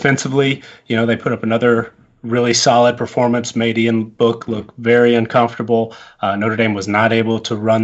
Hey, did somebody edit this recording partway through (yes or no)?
no